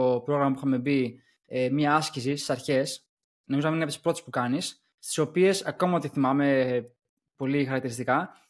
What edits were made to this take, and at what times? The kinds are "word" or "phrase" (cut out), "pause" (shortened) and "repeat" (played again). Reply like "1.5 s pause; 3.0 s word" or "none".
none

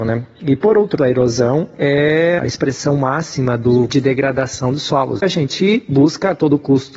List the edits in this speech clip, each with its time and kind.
1.0 s word; 2.4 s word; 3.9 s word; 5.2 s word

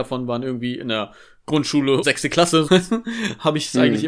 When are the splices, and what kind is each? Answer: 2.0 s word; 2.7 s word

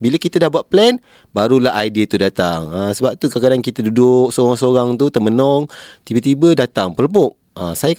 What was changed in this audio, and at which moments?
none

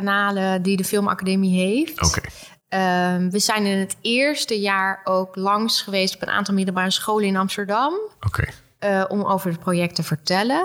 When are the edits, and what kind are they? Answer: none

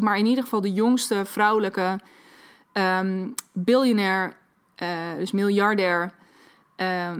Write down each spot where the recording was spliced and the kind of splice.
none

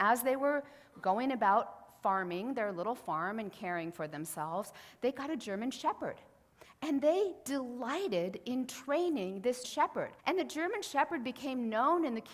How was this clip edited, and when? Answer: 9.6 s word; 10.2 s pause

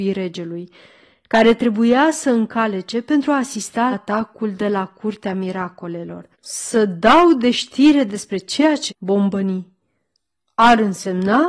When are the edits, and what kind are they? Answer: 3.9 s word; 6.3 s pause; 8.9 s word

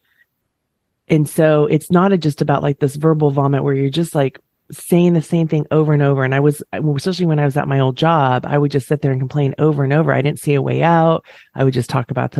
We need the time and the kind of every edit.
4.5 s pause

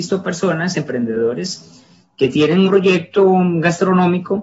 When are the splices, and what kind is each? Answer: 2.7 s word

